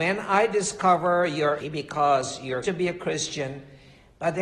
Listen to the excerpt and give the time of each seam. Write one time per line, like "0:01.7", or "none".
0:01.6
0:02.6